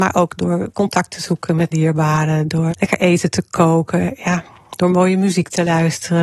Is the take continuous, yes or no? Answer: no